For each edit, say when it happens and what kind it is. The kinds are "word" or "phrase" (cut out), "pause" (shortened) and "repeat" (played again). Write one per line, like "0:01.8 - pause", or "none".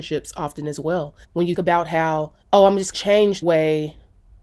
0:01.2 - pause
0:01.6 - word
0:02.4 - pause
0:02.9 - phrase
0:03.4 - word